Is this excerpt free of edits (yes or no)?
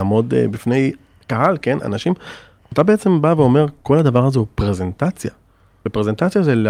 yes